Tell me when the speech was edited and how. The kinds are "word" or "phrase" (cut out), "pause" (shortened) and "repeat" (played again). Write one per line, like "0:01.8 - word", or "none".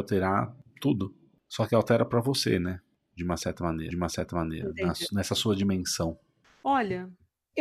0:03.9 - repeat